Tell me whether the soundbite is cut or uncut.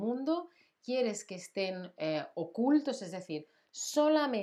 uncut